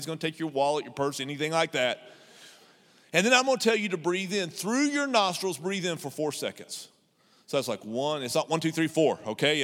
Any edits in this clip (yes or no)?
no